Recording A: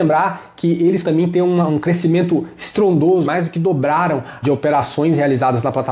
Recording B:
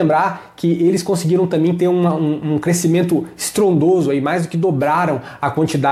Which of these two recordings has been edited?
A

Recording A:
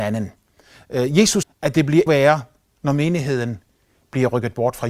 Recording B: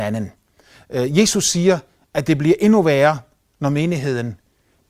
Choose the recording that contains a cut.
A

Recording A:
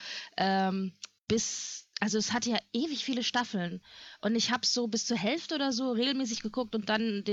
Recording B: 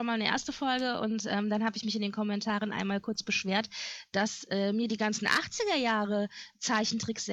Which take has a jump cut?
A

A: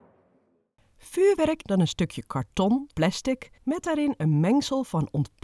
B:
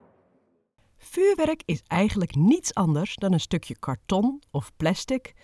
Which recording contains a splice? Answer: A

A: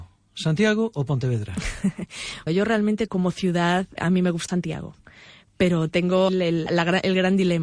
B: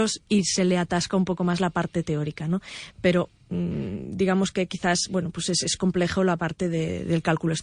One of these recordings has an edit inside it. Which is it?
A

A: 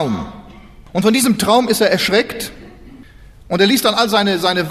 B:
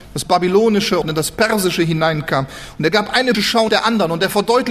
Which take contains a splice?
B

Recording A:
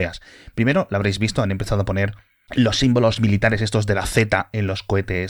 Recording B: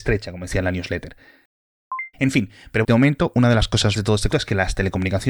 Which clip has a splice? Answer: B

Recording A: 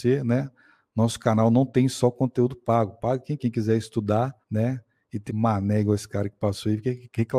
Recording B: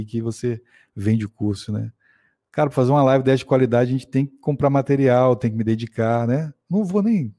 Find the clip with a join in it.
A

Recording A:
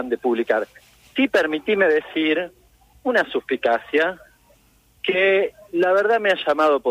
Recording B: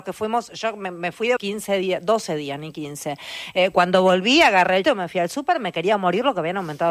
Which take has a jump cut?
B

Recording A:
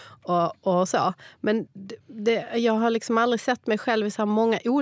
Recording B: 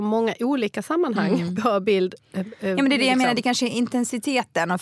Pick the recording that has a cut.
A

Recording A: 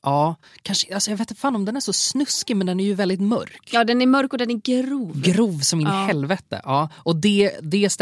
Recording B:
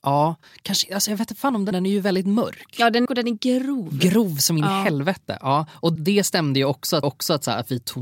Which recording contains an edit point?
B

